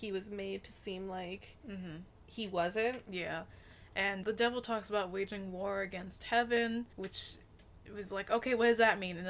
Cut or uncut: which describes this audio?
cut